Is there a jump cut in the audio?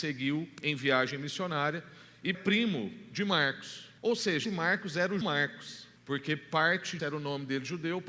yes; 6 cuts; at 2.3 s, 4.0 s, 4.4 s, 5.2 s, 6.0 s, 7.0 s

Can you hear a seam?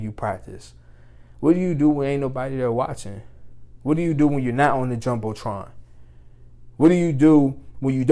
no; 0 cuts

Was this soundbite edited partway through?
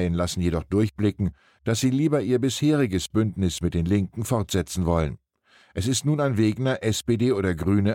no; 0 cuts

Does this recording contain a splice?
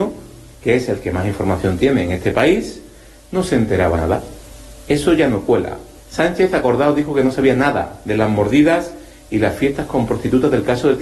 yes; 1 cut; at 3.9 s

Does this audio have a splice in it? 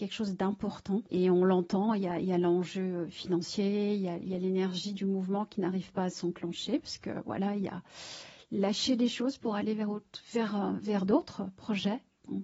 yes; 1 cut; at 1.1 s

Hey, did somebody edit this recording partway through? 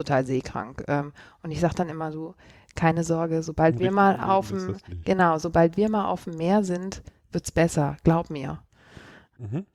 no; 0 cuts

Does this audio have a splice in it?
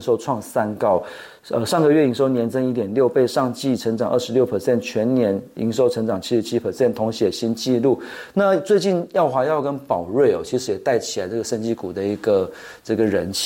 no; 0 cuts

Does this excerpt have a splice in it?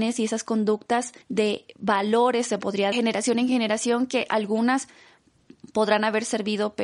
yes; 2 cuts; at 1.2 s, 2.9 s

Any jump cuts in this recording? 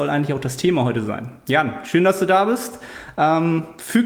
no; 0 cuts

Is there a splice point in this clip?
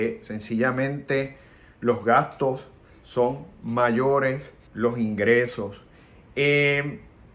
yes; 1 cut; at 4.7 s

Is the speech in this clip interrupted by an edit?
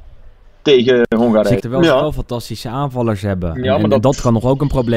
yes; 1 cut; at 1.6 s

